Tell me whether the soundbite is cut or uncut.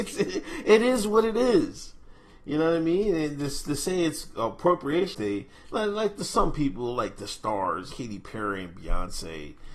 cut